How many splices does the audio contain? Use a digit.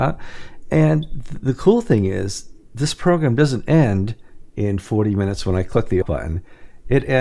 1